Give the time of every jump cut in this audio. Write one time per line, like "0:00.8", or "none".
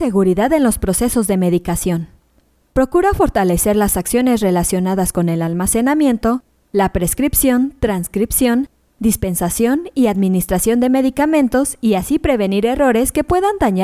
none